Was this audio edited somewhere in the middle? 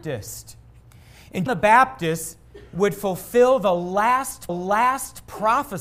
yes; 2 cuts; at 1.5 s, 4.5 s

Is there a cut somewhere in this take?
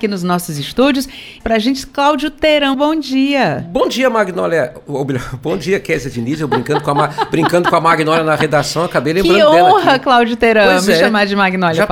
yes; 2 cuts; at 1.4 s, 2.7 s

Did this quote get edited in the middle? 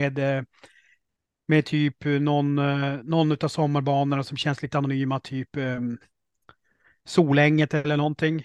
no; 0 cuts

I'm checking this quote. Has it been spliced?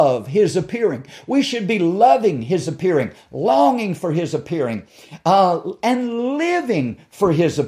no; 0 cuts

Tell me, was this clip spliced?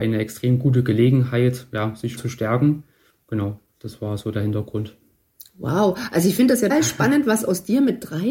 yes; 3 cuts; at 2.2 s, 3.7 s, 6.7 s

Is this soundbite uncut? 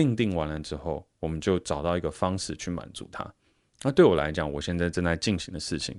yes; 0 cuts

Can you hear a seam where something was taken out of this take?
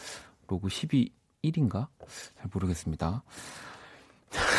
no; 0 cuts

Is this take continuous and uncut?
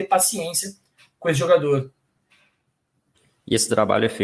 yes; 0 cuts

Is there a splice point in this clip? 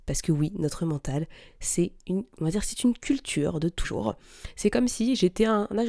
yes; 2 cuts; at 2.3 s, 3.8 s

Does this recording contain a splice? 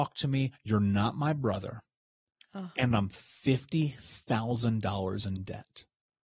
no; 0 cuts

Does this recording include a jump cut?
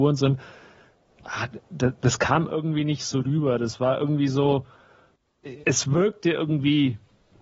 yes; 1 cut; at 5.6 s

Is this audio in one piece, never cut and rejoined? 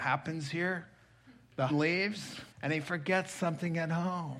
no; 2 cuts; at 1.7 s, 2.5 s

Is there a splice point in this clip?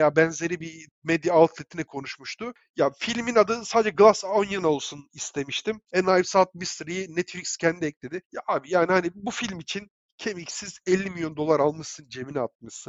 no; 0 cuts

